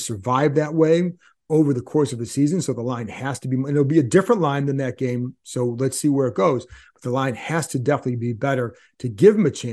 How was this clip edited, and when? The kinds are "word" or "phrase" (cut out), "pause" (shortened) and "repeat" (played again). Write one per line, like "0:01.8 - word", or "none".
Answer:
none